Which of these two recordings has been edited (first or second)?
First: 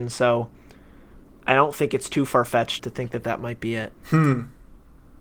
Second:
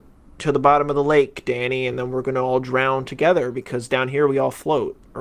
first